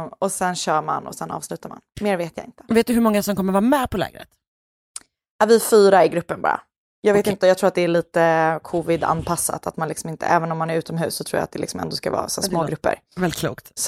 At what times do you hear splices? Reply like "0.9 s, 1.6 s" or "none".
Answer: none